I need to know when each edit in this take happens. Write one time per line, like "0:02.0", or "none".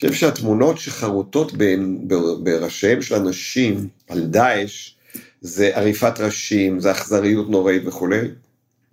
0:04.0